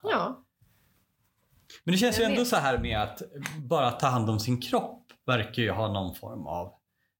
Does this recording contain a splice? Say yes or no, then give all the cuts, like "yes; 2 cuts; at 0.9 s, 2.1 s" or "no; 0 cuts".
no; 0 cuts